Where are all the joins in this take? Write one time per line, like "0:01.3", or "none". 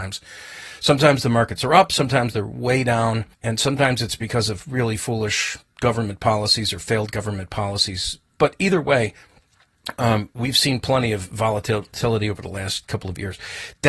0:03.3